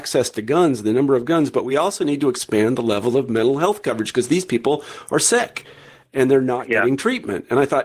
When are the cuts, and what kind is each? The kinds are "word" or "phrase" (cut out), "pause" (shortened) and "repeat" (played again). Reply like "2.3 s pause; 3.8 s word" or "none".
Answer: none